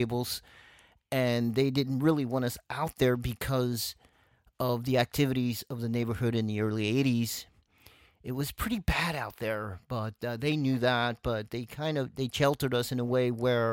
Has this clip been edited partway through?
no; 0 cuts

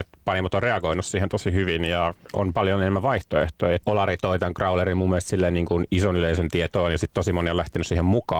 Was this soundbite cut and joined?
yes; 1 cut; at 3.8 s

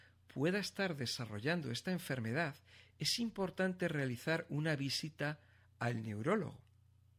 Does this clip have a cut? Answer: no; 0 cuts

